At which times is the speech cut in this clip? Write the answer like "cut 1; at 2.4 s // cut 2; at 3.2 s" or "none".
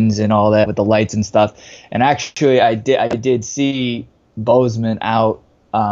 none

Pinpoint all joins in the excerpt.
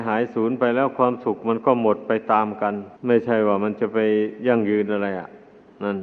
cut 1; at 3.0 s

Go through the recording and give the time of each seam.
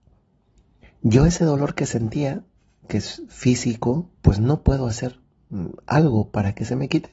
cut 1; at 4.1 s

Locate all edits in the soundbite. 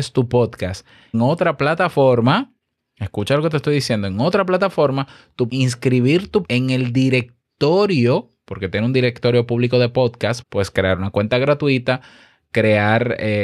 cut 1; at 1.1 s // cut 2; at 5.5 s // cut 3; at 6.4 s // cut 4; at 10.4 s

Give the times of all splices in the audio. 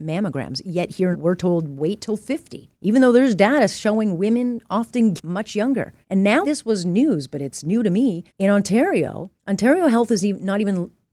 cut 1; at 1.1 s // cut 2; at 2.7 s // cut 3; at 5.2 s // cut 4; at 6.0 s // cut 5; at 6.4 s // cut 6; at 8.3 s // cut 7; at 9.4 s

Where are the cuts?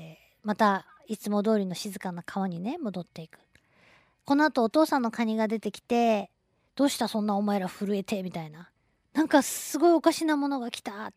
cut 1; at 6.3 s // cut 2; at 8.8 s

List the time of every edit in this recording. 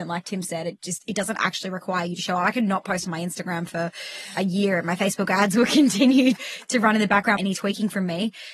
cut 1; at 6.4 s // cut 2; at 7.4 s

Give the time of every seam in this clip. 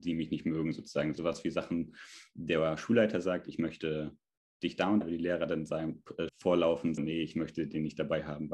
cut 1; at 5.0 s // cut 2; at 6.3 s // cut 3; at 7.0 s

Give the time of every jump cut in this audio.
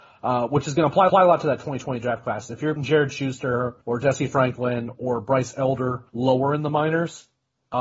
cut 1; at 1.1 s // cut 2; at 2.8 s // cut 3; at 3.8 s // cut 4; at 6.1 s

